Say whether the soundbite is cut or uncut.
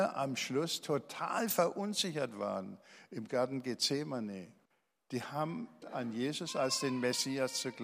cut